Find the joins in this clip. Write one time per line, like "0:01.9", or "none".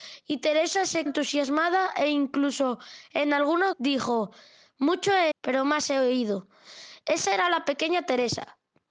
0:01.1
0:03.7
0:05.3